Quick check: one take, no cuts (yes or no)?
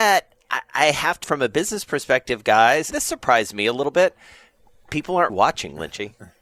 no